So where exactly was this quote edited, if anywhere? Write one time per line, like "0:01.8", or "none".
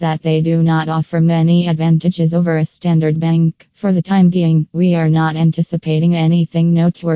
0:03.7